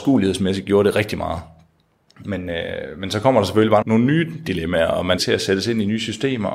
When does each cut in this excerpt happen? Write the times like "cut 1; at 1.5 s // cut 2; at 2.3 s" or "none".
cut 1; at 3.8 s // cut 2; at 5.2 s